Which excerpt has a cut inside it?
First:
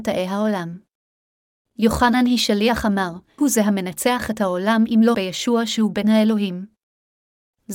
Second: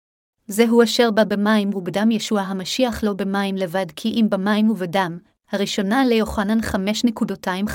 first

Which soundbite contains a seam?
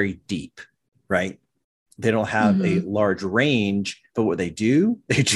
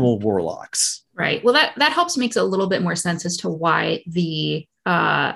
second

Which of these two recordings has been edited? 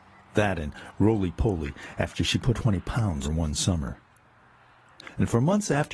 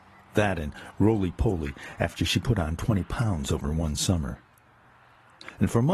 first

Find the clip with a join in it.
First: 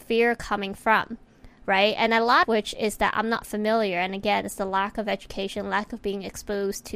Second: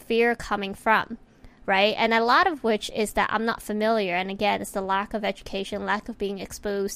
first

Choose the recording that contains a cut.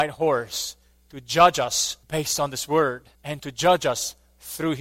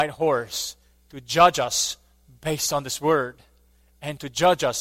first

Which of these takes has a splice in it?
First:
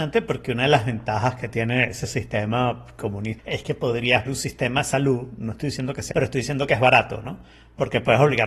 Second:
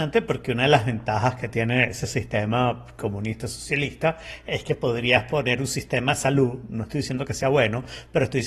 first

